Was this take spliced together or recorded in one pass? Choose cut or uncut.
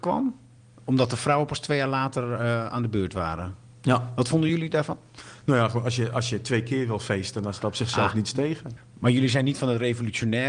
uncut